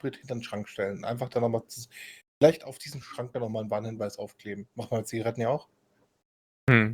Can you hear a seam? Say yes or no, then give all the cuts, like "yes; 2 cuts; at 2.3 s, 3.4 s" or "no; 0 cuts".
no; 0 cuts